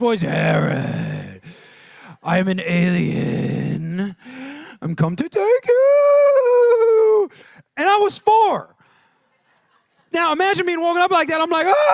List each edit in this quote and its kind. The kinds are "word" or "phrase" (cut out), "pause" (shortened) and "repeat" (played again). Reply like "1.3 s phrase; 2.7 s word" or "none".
none